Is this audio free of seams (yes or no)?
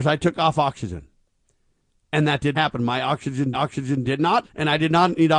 no